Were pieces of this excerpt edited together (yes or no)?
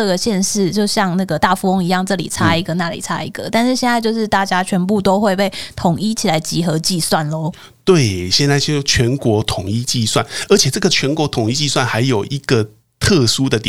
no